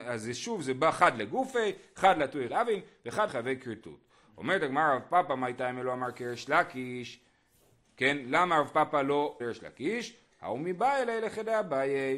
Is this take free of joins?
no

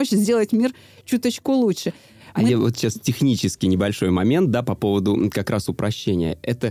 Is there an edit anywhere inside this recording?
no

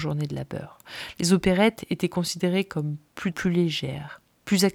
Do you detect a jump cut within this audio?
yes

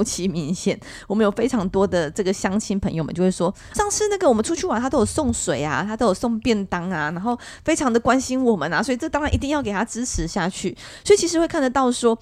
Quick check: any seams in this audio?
yes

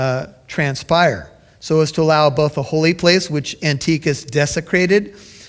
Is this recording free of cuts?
yes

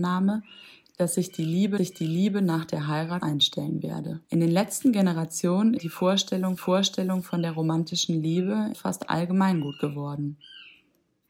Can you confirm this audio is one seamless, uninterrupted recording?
no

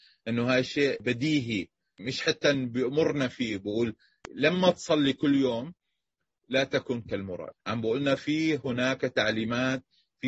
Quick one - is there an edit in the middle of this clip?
no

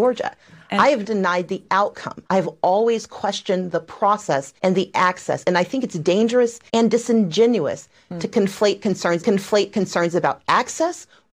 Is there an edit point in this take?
yes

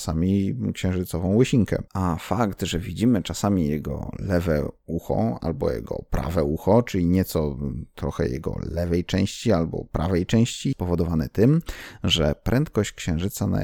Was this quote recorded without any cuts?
no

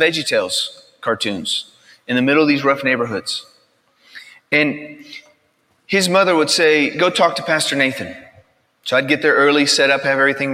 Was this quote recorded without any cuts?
yes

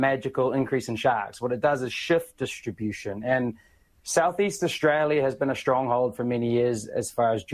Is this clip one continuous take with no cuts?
yes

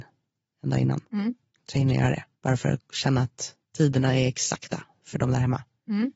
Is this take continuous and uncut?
no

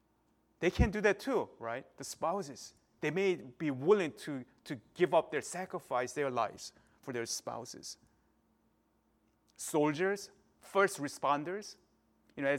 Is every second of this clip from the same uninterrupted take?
yes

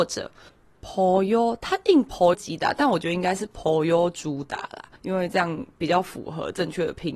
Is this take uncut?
no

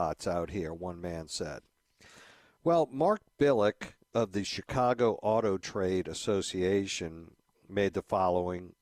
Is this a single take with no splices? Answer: yes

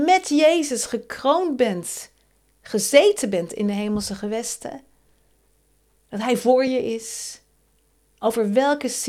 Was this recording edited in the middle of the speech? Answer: no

